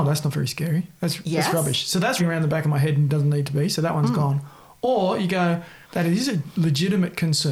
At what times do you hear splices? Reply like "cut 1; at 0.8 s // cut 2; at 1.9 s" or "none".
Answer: cut 1; at 2.2 s // cut 2; at 5.8 s